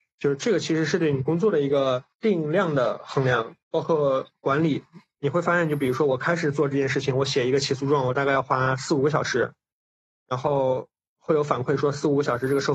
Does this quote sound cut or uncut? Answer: cut